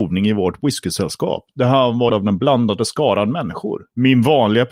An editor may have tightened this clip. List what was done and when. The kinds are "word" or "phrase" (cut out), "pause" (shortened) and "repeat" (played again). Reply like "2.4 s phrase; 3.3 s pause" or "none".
2.1 s word